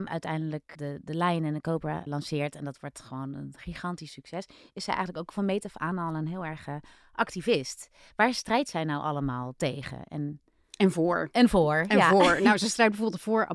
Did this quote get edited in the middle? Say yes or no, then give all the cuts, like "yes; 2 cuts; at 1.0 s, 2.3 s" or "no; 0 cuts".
yes; 1 cut; at 2.1 s